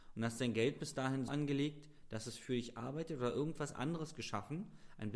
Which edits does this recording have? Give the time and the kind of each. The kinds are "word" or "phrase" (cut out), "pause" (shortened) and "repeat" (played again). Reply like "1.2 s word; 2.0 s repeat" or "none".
1.3 s word